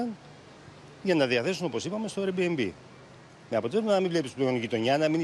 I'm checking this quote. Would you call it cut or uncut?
uncut